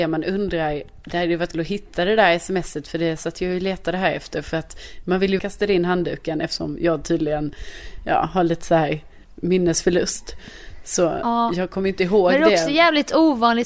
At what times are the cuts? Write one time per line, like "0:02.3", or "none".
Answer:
0:01.5
0:05.4
0:09.2